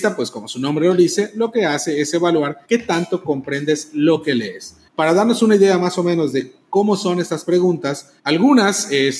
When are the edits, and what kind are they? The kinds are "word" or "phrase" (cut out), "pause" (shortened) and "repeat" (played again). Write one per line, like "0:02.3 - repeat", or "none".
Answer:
0:02.6 - pause
0:04.9 - pause
0:08.2 - pause